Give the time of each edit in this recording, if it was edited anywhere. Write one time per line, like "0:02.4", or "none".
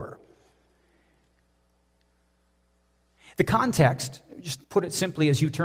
0:04.6